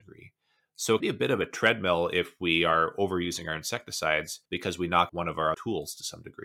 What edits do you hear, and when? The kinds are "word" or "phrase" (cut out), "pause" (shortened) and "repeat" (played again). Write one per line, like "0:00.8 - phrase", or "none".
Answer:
0:01.0 - word
0:04.5 - pause
0:05.1 - word
0:05.5 - word